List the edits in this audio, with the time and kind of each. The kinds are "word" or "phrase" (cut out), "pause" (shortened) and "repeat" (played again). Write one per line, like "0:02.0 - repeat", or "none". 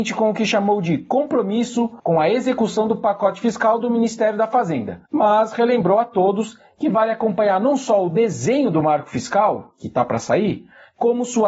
0:02.0 - pause
0:05.1 - pause